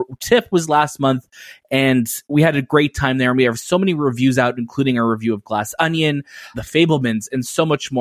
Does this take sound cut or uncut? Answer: cut